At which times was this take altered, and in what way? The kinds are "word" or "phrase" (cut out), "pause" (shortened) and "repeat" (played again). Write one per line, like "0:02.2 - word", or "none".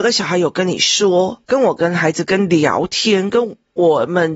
0:01.4 - phrase